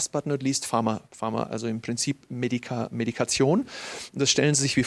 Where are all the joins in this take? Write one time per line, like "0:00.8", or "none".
0:01.1

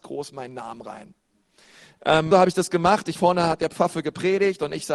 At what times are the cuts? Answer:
0:02.3
0:03.1

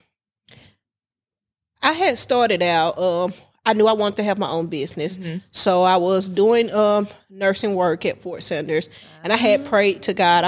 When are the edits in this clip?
none

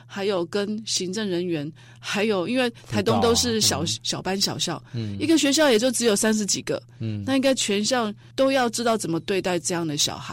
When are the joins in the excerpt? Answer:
0:08.3

